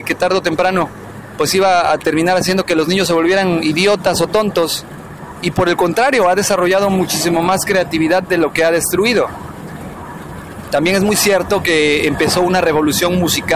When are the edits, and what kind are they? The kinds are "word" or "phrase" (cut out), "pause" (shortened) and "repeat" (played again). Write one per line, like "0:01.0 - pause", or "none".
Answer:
none